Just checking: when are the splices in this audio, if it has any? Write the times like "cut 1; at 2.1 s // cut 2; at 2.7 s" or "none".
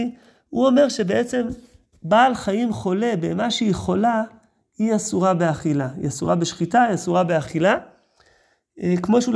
none